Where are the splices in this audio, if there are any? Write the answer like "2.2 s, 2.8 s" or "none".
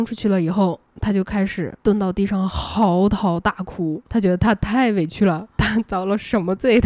1.8 s